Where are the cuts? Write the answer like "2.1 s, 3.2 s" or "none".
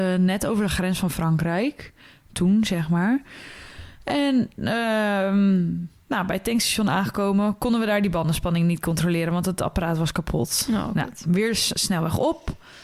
none